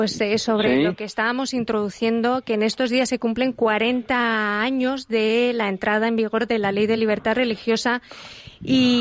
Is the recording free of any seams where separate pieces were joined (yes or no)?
yes